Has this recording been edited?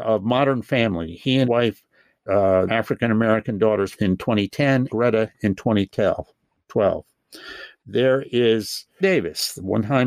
yes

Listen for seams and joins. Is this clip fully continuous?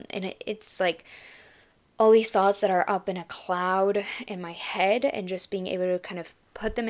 yes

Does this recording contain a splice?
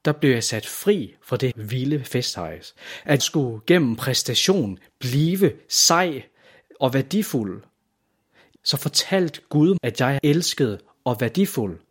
yes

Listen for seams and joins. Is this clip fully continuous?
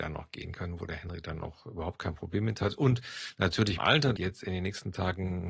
no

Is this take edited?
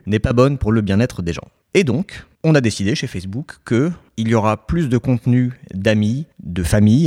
no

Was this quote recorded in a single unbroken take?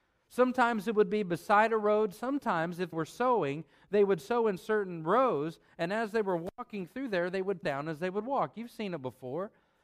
no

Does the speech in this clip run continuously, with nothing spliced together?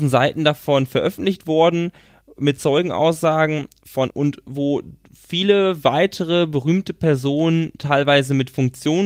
no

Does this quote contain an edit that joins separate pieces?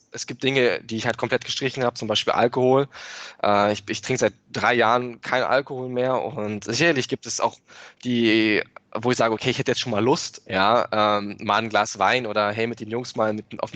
no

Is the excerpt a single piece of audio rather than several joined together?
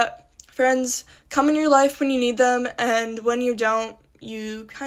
yes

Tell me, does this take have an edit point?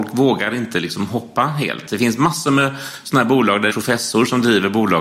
yes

